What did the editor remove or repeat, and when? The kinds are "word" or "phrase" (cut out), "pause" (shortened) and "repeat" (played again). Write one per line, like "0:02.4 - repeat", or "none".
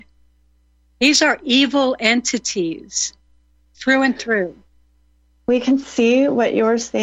none